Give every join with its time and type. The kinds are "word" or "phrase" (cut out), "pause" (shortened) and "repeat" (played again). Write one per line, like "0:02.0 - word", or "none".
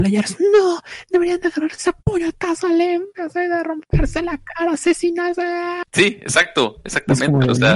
0:02.0 - pause
0:05.9 - pause